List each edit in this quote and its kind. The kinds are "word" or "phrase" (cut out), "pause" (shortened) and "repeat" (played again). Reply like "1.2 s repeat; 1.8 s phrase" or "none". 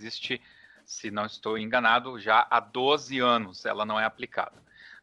none